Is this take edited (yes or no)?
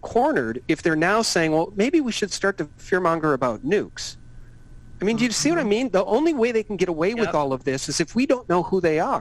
no